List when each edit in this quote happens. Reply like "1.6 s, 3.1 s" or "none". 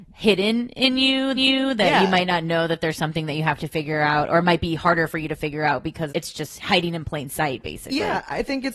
1.4 s, 6.1 s